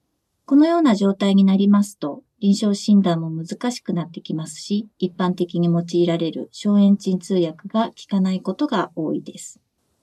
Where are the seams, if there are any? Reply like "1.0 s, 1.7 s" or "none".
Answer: 4.9 s